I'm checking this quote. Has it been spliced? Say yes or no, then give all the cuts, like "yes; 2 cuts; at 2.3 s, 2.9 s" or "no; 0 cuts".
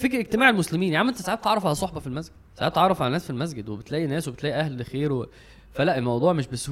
yes; 1 cut; at 2.5 s